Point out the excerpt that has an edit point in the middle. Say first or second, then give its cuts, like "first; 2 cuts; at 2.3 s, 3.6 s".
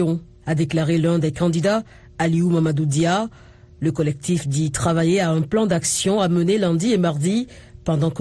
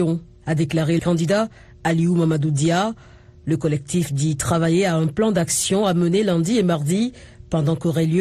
second; 1 cut; at 1.0 s